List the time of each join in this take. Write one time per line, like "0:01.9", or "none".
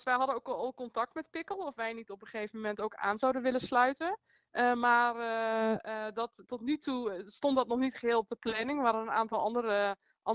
none